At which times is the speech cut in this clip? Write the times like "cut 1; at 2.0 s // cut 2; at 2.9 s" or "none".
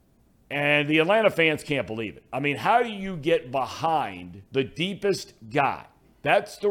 cut 1; at 4.5 s

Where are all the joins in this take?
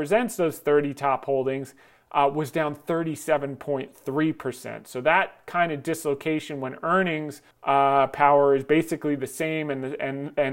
cut 1; at 7.5 s

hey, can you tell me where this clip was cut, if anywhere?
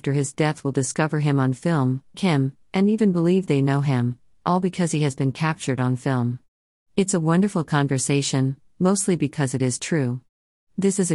cut 1; at 2.1 s

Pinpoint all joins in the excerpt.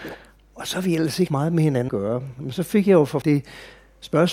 cut 1; at 1.3 s // cut 2; at 1.9 s // cut 3; at 3.2 s

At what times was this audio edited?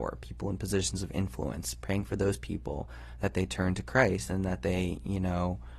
none

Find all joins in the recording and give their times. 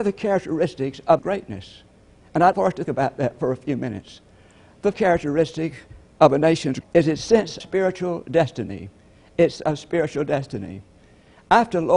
cut 1; at 1.2 s // cut 2; at 2.5 s // cut 3; at 2.9 s // cut 4; at 4.9 s // cut 5; at 6.8 s // cut 6; at 7.6 s // cut 7; at 9.6 s

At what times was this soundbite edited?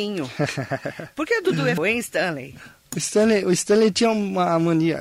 cut 1; at 1.3 s // cut 2; at 1.8 s

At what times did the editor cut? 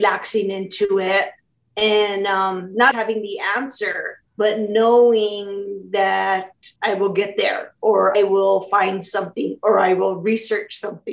cut 1; at 2.9 s // cut 2; at 4.3 s // cut 3; at 6.8 s // cut 4; at 8.1 s

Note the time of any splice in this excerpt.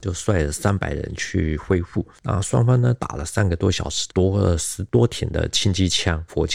none

